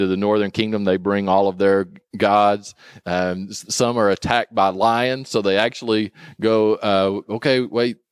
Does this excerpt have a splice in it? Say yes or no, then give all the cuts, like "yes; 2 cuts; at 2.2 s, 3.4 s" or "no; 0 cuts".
no; 0 cuts